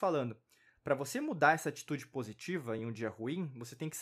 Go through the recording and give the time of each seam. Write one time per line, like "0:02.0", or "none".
none